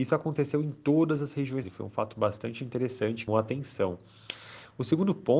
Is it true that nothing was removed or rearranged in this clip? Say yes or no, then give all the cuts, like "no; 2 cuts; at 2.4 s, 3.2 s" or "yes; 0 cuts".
no; 2 cuts; at 1.6 s, 3.3 s